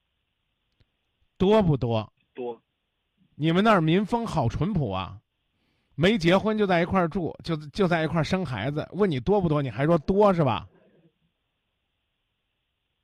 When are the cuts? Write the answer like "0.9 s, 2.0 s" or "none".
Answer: 2.2 s

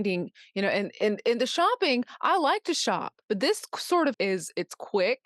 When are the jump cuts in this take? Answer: 3.2 s, 4.1 s

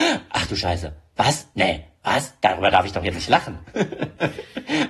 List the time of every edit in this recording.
3.1 s

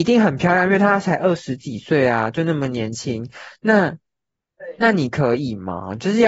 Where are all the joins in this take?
none

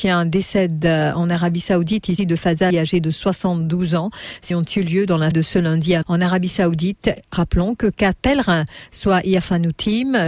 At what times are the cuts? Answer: 2.2 s, 2.7 s, 4.5 s, 5.3 s, 6.0 s, 8.2 s

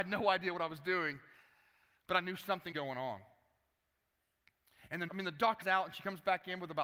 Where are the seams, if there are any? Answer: 2.7 s, 5.1 s, 5.6 s

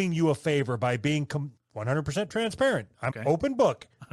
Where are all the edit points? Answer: 1.6 s, 3.1 s

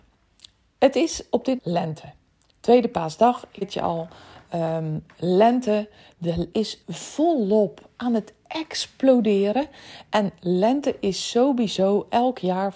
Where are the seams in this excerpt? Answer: 1.6 s, 3.6 s, 6.5 s, 6.8 s

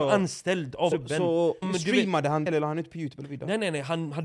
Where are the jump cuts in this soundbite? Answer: 0.9 s, 1.6 s, 2.5 s

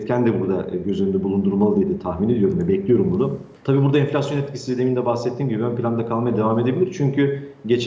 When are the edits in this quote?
3.6 s

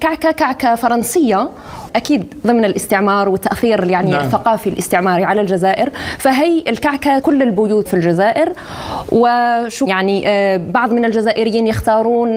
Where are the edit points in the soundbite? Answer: 1.9 s, 7.2 s, 7.9 s, 9.9 s

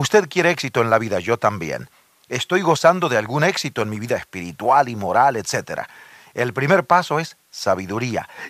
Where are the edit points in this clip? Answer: none

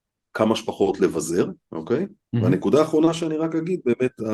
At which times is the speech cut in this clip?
1.6 s, 2.3 s

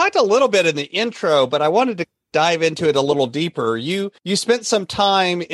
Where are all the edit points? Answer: 4.2 s

